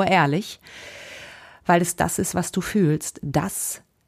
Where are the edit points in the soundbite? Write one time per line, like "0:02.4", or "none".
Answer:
none